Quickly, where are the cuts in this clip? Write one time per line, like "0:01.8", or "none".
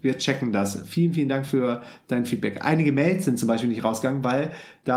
none